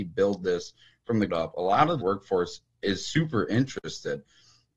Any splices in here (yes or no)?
yes